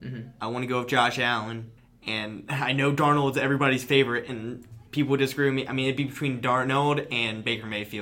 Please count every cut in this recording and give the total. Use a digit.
2